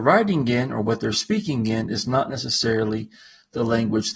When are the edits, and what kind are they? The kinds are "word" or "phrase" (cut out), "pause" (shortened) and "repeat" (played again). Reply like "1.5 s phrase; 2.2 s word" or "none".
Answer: none